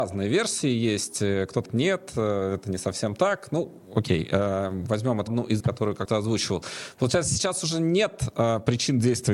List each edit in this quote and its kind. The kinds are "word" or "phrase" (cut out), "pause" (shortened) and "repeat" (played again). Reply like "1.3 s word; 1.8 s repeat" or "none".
1.6 s word; 5.3 s word; 5.6 s word; 6.0 s word